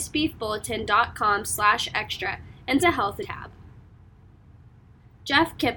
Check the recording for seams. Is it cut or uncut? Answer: cut